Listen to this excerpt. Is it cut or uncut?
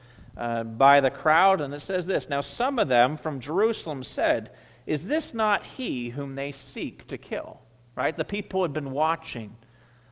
uncut